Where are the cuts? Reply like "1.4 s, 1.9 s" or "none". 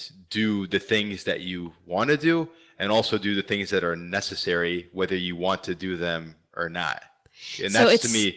none